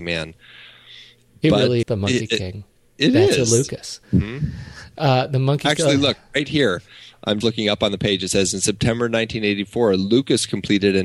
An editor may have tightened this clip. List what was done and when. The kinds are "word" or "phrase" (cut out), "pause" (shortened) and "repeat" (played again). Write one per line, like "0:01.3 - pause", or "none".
0:01.8 - phrase
0:04.0 - pause
0:07.4 - word